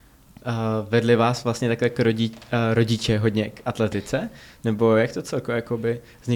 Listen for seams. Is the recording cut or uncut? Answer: uncut